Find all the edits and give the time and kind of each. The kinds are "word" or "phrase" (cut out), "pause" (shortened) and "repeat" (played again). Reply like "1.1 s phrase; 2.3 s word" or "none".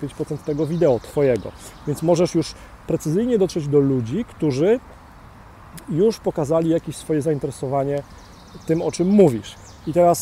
none